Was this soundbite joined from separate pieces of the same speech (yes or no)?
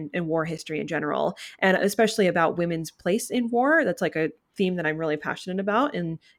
no